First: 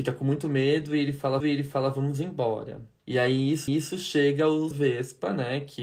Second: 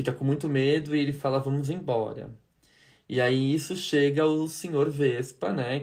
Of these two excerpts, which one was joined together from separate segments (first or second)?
first